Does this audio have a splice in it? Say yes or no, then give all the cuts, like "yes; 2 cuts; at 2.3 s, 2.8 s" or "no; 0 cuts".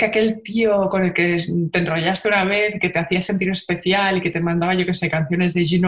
no; 0 cuts